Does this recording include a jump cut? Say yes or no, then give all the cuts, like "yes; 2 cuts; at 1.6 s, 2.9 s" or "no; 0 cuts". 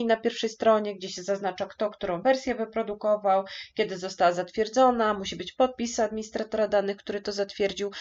no; 0 cuts